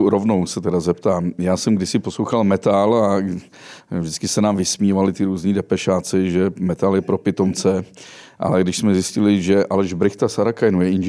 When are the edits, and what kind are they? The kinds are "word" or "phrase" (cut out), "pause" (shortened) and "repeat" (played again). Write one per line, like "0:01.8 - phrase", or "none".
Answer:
none